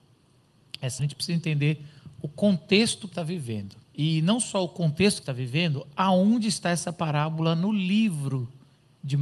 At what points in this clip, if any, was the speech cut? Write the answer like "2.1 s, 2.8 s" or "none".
1.0 s, 3.1 s, 3.8 s, 5.2 s